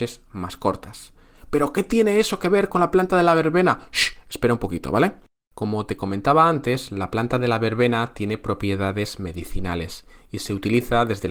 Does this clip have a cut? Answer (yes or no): no